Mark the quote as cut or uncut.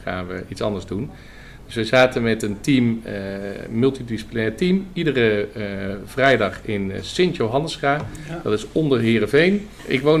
uncut